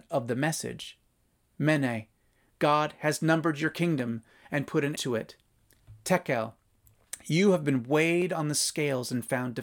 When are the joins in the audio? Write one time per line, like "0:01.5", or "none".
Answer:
0:05.0